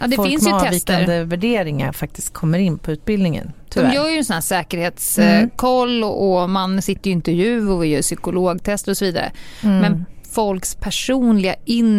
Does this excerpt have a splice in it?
no; 0 cuts

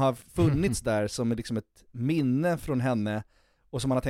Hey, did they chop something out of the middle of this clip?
no; 0 cuts

